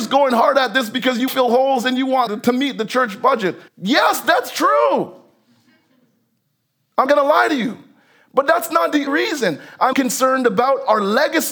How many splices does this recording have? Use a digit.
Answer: 6